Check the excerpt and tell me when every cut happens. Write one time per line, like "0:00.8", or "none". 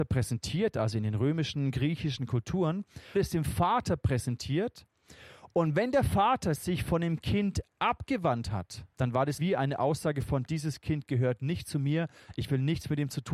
0:02.2
0:03.1
0:08.9
0:09.4